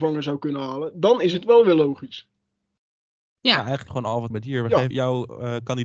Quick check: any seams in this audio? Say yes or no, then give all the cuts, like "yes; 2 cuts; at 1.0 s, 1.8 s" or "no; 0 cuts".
yes; 3 cuts; at 3.9 s, 4.3 s, 4.9 s